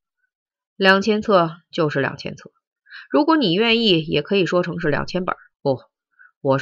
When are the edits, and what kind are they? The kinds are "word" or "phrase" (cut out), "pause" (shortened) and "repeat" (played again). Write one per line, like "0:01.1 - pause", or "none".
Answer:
0:05.5 - pause